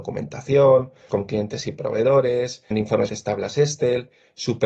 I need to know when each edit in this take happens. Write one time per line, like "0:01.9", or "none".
0:01.1
0:02.7
0:03.1